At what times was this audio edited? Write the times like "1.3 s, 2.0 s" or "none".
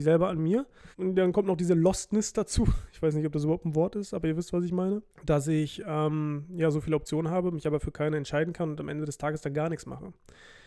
0.9 s, 5.1 s